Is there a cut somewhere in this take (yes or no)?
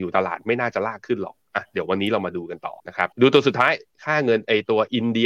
yes